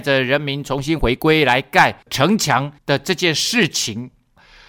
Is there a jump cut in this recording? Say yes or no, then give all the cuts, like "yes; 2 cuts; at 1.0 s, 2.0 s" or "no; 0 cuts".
yes; 2 cuts; at 2.0 s, 2.8 s